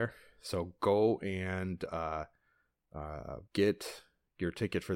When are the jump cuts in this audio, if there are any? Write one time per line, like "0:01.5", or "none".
0:03.5